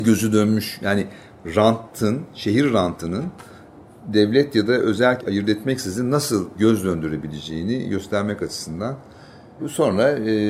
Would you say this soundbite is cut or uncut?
cut